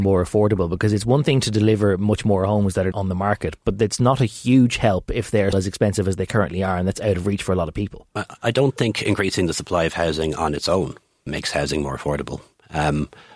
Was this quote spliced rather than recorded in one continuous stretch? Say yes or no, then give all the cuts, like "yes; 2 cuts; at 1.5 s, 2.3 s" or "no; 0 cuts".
yes; 3 cuts; at 2.9 s, 5.5 s, 11.3 s